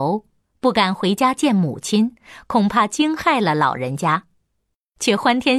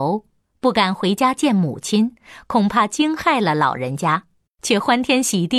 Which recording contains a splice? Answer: second; 1 cut; at 4.5 s

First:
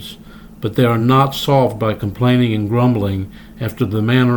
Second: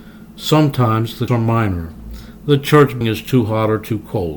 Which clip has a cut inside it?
second; 2 cuts; at 1.3 s, 3.0 s

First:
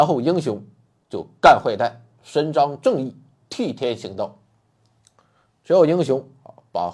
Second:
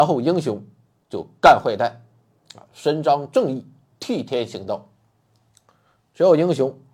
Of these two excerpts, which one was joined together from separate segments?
first; 1 cut; at 2.2 s

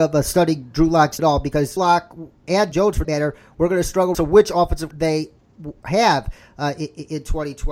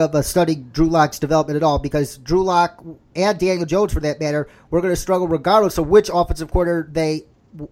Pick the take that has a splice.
first; 6 cuts; at 1.2 s, 1.8 s, 2.7 s, 3.0 s, 4.1 s, 4.9 s

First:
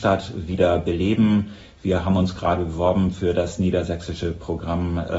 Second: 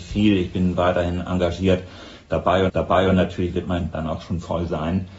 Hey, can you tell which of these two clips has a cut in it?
second; 2 cuts; at 2.7 s, 3.9 s

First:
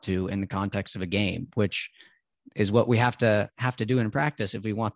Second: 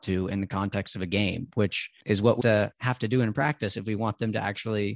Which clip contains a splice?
second; 2 cuts; at 2.0 s, 2.4 s

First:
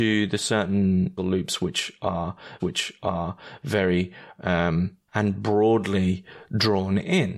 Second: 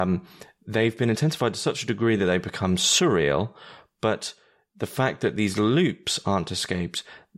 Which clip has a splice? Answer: first; 3 cuts; at 1.2 s, 2.6 s, 5.1 s

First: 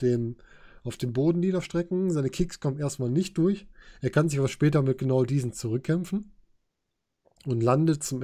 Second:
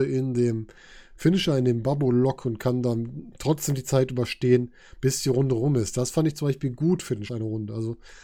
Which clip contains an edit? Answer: second; 1 cut; at 7.3 s

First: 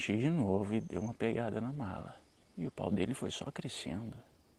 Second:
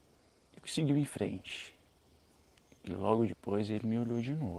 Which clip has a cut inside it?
first; 1 cut; at 2.4 s

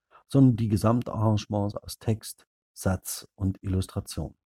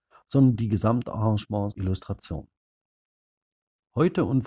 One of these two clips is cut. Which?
second; 1 cut; at 1.7 s

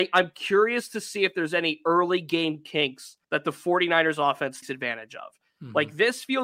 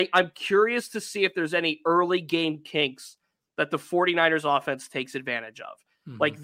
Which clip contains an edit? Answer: first; 2 cuts; at 3.2 s, 4.6 s

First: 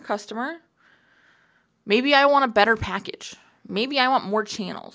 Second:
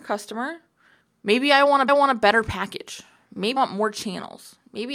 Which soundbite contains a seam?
second; 3 cuts; at 1.0 s, 1.9 s, 3.6 s

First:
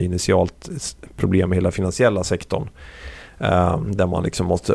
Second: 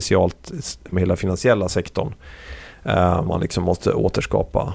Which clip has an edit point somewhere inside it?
second; 2 cuts; at 0.9 s, 3.3 s

